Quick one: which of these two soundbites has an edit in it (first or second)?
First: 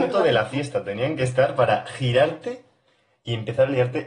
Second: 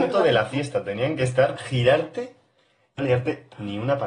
second